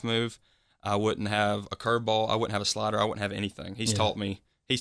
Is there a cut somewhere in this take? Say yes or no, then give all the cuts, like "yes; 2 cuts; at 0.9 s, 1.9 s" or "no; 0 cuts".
no; 0 cuts